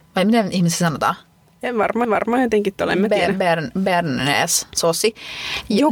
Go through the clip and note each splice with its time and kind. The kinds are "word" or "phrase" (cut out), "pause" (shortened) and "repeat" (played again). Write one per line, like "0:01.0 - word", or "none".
0:02.0 - repeat